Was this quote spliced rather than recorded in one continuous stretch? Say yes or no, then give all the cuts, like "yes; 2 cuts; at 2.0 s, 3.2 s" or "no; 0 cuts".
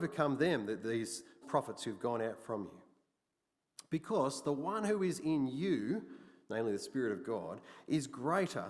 yes; 1 cut; at 1.4 s